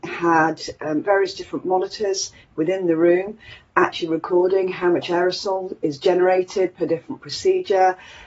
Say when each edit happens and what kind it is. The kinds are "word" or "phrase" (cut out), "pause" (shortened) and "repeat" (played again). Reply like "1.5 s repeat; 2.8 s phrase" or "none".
none